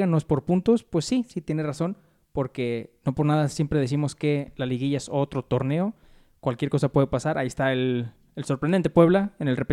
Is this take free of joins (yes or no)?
yes